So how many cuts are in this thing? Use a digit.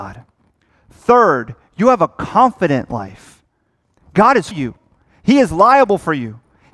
1